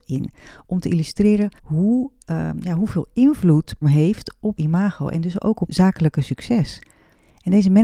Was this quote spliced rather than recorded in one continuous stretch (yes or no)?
yes